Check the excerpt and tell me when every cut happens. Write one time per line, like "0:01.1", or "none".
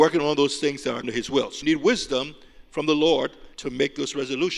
0:01.0
0:01.6
0:03.5